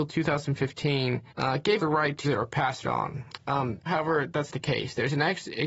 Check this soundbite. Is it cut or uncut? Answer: cut